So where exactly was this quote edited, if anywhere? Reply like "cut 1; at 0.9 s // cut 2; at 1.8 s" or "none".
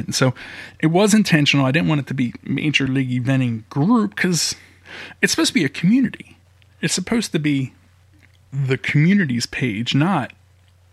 none